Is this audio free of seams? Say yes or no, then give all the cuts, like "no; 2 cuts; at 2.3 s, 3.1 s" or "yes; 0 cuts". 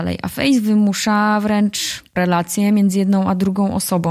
no; 1 cut; at 2.2 s